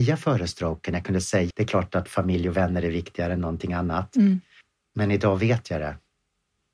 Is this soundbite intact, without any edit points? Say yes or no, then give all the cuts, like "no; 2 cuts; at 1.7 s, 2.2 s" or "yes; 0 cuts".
no; 1 cut; at 1.5 s